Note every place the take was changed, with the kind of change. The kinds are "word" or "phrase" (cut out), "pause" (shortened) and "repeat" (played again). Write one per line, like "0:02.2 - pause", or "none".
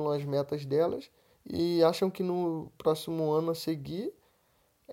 0:01.3 - pause